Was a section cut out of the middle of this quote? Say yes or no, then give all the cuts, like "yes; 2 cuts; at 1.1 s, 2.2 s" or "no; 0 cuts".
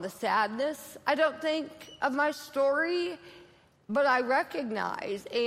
no; 0 cuts